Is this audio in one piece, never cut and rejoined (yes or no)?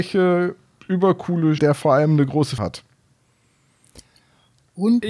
no